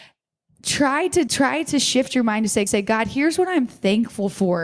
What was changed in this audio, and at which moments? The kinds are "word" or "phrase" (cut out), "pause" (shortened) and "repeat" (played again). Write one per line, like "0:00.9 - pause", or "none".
0:01.3 - word
0:02.7 - repeat